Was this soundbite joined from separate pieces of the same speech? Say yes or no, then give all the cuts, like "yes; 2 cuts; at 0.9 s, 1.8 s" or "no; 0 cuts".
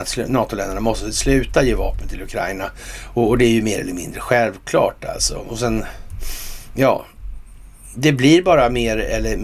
no; 0 cuts